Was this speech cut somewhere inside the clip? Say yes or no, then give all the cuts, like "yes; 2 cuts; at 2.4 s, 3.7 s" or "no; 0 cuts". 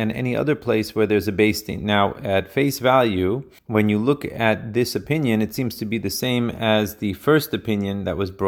yes; 1 cut; at 3.6 s